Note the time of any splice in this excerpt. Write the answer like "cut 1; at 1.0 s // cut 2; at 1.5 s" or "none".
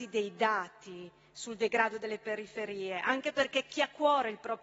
none